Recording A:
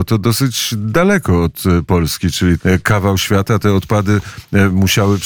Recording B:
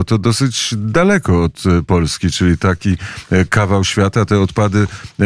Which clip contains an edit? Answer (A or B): A